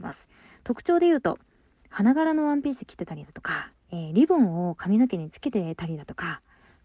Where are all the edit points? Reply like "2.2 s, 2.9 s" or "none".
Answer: 3.8 s